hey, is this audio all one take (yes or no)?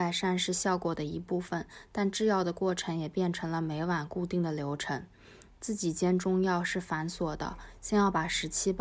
yes